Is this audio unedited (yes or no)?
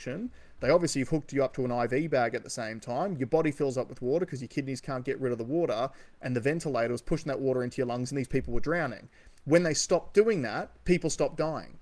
yes